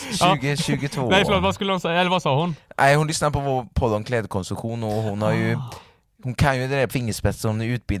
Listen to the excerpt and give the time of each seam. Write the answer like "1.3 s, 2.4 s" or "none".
6.9 s